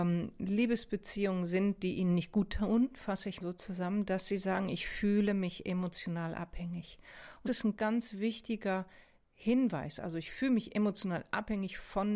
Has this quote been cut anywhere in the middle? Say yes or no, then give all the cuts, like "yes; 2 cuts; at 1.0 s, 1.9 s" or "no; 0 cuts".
yes; 3 cuts; at 3.4 s, 7.5 s, 7.8 s